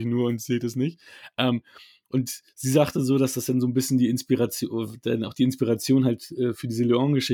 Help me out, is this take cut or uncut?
uncut